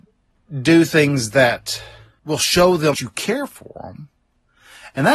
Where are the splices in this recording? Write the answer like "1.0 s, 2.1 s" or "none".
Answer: 2.9 s